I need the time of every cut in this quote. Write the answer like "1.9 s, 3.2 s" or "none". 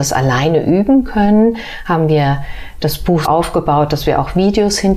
3.2 s